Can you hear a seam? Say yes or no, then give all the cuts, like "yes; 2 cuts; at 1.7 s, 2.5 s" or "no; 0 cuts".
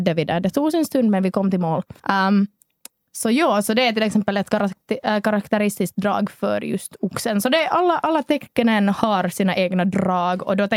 yes; 1 cut; at 2.0 s